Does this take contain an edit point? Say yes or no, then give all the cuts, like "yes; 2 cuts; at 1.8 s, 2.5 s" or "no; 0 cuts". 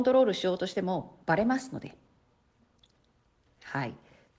no; 0 cuts